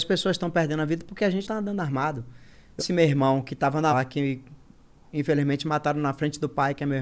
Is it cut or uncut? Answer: cut